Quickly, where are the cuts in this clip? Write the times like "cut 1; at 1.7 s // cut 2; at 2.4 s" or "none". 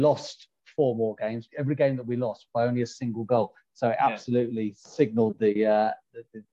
cut 1; at 1.5 s // cut 2; at 2.5 s

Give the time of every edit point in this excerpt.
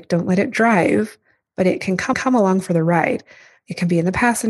cut 1; at 1.5 s // cut 2; at 2.1 s

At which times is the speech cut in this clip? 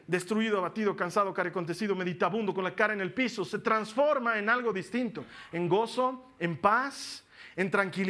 none

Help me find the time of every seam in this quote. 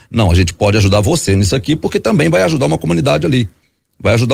none

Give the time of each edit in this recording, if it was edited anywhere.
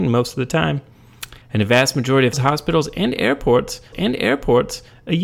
cut 1; at 1.4 s // cut 2; at 2.3 s // cut 3; at 3.9 s

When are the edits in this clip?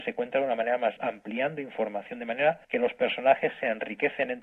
cut 1; at 1.0 s // cut 2; at 2.6 s

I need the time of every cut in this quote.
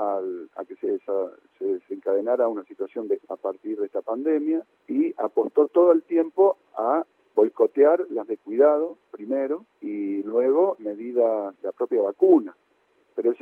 cut 1; at 3.2 s // cut 2; at 4.8 s // cut 3; at 7.2 s // cut 4; at 8.3 s // cut 5; at 9.7 s // cut 6; at 10.8 s // cut 7; at 11.6 s

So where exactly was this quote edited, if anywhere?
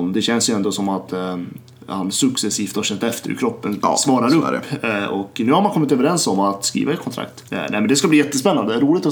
cut 1; at 1.7 s // cut 2; at 7.5 s

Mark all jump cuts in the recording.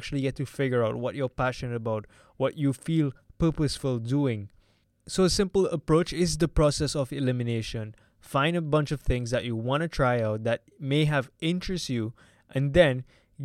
none

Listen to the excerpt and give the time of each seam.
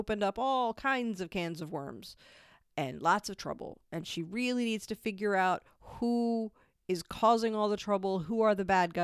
none

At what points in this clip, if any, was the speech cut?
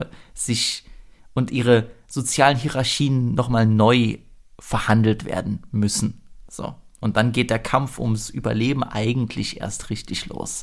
none

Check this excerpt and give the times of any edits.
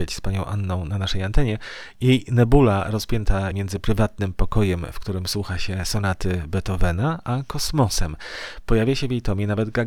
cut 1; at 3.5 s

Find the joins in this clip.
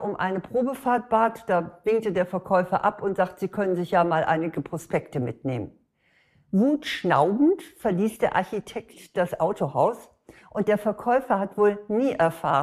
none

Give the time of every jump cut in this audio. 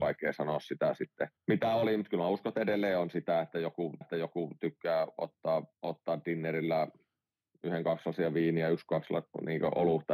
cut 1; at 1.4 s // cut 2; at 4.0 s // cut 3; at 5.7 s

